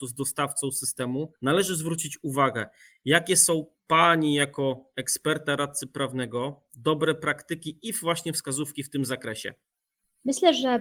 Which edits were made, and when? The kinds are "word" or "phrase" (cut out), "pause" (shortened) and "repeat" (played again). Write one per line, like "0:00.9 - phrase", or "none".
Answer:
none